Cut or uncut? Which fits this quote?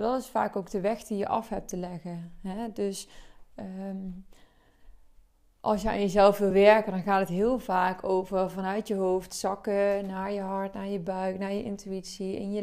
uncut